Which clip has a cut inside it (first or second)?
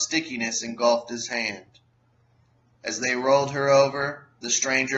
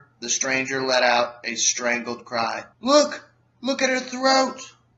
second